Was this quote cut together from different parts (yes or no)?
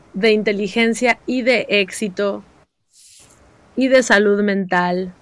no